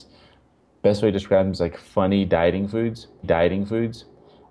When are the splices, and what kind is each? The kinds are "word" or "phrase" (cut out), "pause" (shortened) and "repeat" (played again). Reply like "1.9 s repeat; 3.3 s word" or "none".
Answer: 3.2 s repeat